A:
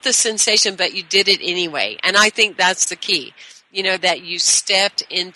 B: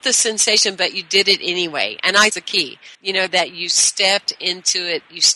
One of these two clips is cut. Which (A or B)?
B